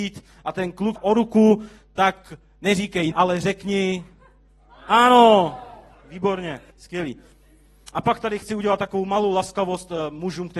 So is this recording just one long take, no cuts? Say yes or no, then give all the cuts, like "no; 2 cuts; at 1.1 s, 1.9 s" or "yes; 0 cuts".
no; 3 cuts; at 1.0 s, 3.1 s, 6.7 s